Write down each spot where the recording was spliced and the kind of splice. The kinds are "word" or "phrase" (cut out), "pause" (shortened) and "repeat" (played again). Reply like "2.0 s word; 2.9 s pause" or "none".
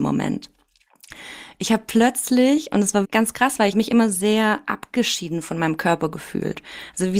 3.0 s word; 3.7 s phrase